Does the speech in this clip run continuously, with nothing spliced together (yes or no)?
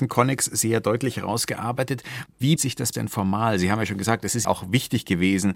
no